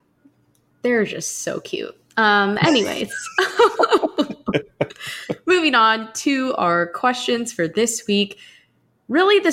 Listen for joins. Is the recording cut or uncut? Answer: uncut